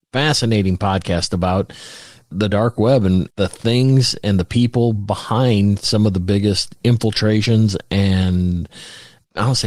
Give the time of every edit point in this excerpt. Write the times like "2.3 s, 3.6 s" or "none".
none